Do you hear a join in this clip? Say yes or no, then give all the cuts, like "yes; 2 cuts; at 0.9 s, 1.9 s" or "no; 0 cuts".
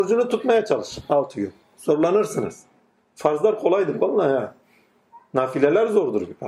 no; 0 cuts